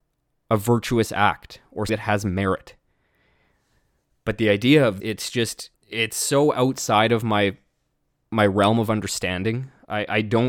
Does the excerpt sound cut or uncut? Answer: cut